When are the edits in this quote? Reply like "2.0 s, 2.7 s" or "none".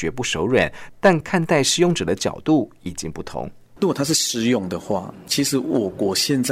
3.7 s

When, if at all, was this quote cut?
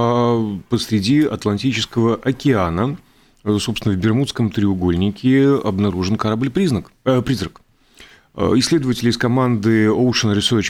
none

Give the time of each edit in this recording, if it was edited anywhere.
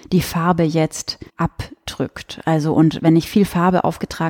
1.3 s

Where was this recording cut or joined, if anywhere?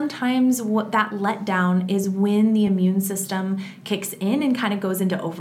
none

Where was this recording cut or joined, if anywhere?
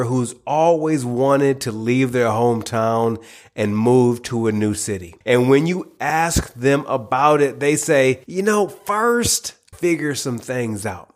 5.2 s, 8.2 s, 9.7 s

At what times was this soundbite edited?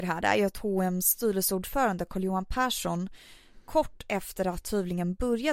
none

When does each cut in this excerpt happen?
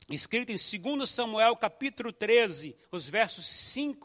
2.8 s

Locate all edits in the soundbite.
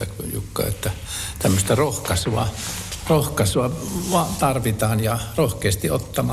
none

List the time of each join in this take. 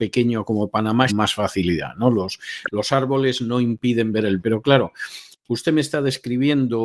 1.1 s, 4.4 s

